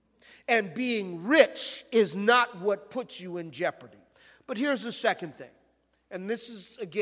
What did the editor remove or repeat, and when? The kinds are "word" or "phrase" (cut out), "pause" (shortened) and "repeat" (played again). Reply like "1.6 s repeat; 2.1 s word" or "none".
none